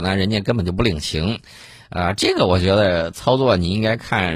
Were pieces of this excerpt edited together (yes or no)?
no